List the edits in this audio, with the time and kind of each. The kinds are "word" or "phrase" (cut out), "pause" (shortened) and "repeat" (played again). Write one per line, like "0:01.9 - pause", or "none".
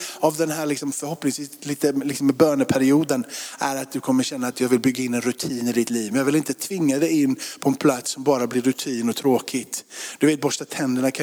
none

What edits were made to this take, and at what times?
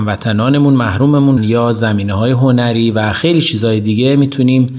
0:01.4 - word

